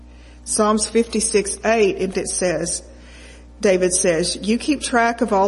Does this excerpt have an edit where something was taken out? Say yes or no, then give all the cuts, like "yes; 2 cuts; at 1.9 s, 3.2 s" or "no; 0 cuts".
yes; 1 cut; at 2.1 s